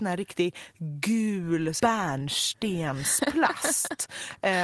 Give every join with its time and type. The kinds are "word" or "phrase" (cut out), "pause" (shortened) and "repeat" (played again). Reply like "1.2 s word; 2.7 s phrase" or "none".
1.8 s word